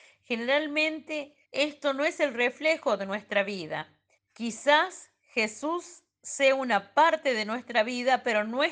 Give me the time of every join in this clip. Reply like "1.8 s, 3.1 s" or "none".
1.4 s, 4.1 s